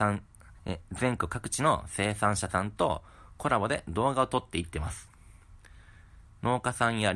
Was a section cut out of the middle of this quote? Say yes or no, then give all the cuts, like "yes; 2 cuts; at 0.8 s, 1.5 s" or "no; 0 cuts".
yes; 1 cut; at 6.2 s